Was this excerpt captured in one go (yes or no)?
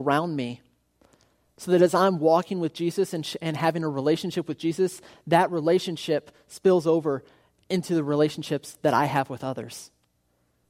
yes